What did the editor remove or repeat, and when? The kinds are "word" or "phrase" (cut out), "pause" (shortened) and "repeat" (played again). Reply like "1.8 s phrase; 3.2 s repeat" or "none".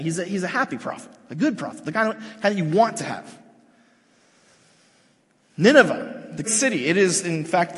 6.4 s word